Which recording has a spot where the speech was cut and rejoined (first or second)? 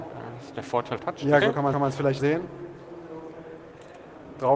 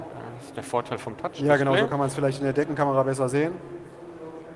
first